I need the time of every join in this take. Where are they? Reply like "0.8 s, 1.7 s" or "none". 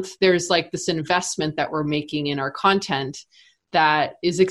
none

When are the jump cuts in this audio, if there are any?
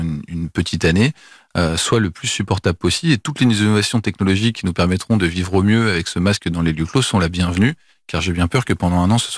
none

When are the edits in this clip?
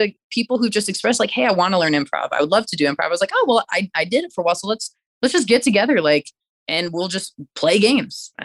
none

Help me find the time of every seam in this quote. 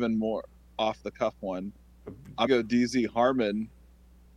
2.5 s

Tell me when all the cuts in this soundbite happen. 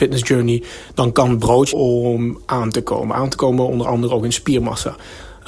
1.7 s

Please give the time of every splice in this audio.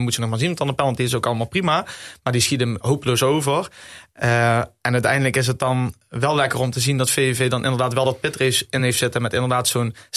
none

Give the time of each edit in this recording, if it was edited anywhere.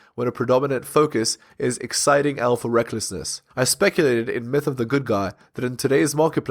3.5 s

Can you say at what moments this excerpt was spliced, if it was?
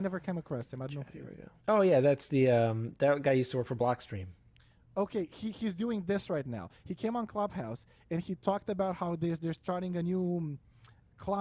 1.6 s, 4.5 s

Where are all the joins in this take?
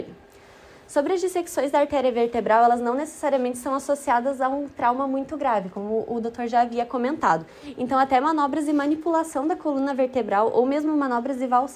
none

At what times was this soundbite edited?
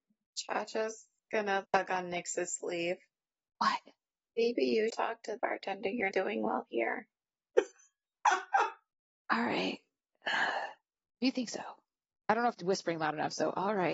1.6 s, 4.9 s, 5.4 s, 6.1 s, 12.5 s

